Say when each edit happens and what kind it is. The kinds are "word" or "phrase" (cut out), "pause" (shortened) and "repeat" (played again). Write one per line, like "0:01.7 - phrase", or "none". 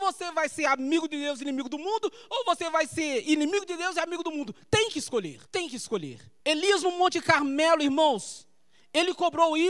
0:05.5 - pause
0:06.4 - pause